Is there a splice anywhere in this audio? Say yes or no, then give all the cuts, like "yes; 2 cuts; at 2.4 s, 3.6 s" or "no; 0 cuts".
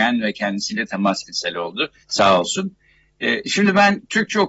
yes; 2 cuts; at 1.2 s, 2.0 s